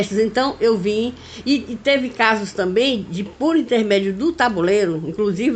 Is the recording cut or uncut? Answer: uncut